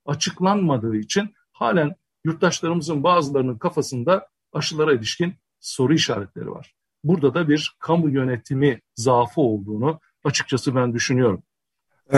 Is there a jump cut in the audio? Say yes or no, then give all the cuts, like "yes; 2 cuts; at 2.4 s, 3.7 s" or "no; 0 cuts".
no; 0 cuts